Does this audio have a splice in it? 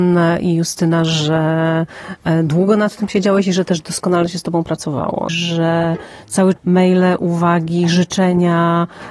yes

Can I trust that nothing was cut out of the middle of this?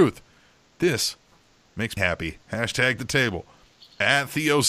no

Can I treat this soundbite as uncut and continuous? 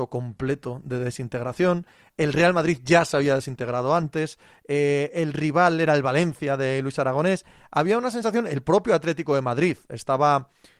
yes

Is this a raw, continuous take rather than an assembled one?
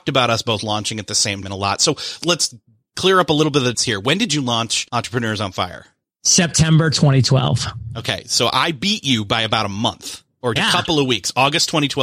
no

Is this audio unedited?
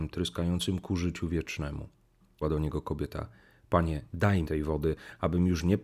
no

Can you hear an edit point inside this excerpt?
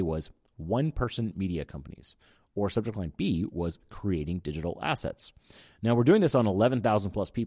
no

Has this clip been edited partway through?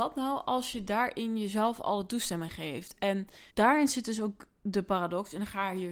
yes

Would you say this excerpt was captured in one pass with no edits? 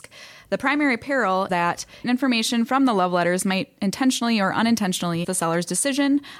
no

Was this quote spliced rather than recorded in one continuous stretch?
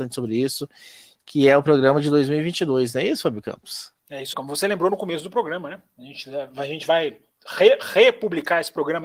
yes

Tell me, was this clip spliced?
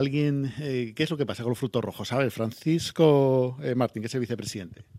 no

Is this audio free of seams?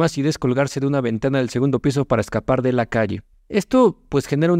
no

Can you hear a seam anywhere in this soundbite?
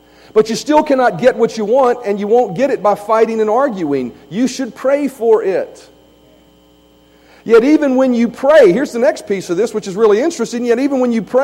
no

